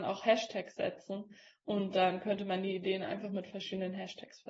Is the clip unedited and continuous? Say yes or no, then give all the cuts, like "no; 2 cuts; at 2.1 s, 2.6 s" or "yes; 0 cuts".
yes; 0 cuts